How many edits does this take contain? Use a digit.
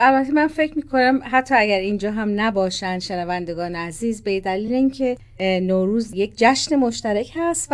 0